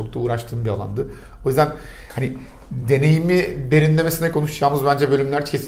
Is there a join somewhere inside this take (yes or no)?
no